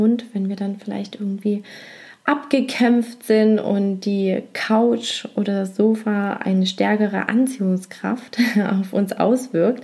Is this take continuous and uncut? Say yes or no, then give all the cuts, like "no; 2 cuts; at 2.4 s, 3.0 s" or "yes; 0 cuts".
yes; 0 cuts